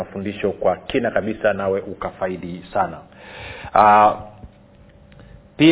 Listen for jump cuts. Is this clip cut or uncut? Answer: uncut